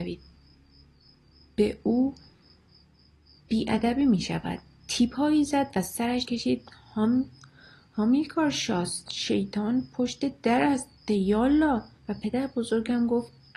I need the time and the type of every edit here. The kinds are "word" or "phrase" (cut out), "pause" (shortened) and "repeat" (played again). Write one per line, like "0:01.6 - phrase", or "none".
0:06.2 - word
0:12.0 - pause